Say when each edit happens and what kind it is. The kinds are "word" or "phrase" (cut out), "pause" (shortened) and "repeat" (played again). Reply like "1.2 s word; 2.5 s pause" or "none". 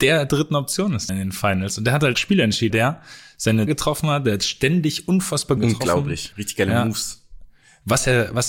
1.1 s phrase; 2.2 s word; 2.7 s word; 3.7 s word; 5.6 s phrase; 6.3 s word